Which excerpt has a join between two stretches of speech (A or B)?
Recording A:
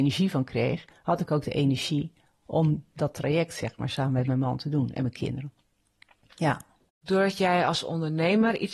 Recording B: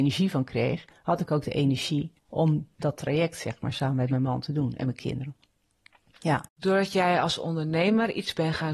B